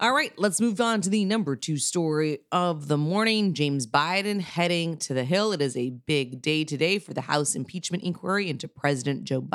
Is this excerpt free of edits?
yes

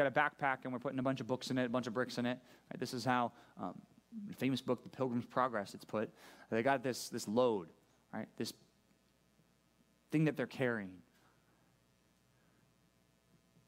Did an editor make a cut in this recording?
no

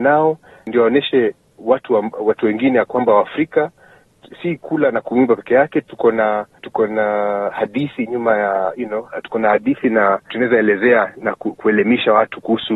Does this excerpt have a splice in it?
yes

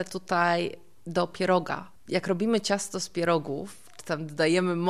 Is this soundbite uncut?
yes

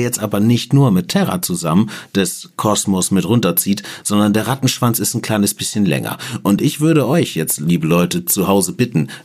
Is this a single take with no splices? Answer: yes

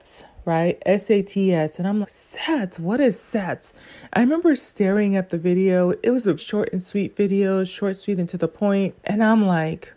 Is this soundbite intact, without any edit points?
no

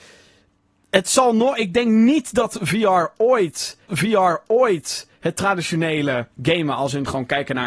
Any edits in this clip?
yes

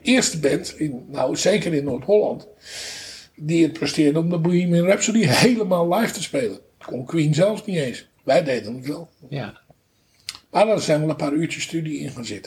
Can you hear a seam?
no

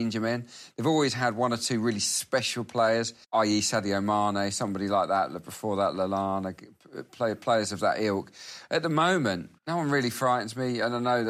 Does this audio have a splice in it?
yes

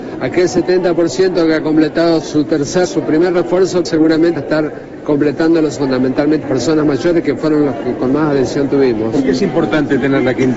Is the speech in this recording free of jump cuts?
no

